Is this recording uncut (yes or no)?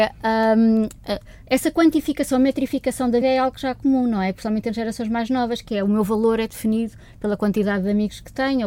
no